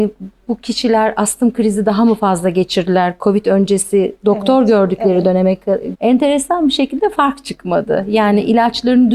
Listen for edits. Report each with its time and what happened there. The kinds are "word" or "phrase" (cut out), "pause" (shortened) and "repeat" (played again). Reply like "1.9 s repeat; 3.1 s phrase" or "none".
5.9 s word